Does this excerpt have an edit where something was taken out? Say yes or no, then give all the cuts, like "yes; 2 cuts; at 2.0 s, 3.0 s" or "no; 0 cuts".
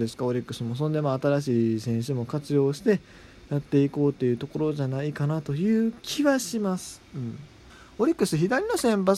no; 0 cuts